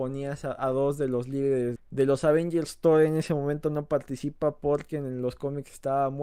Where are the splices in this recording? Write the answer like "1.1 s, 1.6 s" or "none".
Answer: 1.8 s